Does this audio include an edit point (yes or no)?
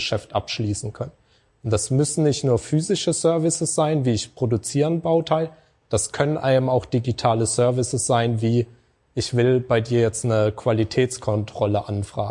no